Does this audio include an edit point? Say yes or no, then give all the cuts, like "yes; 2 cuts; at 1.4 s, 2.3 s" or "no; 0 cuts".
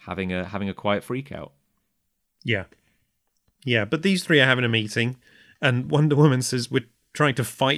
no; 0 cuts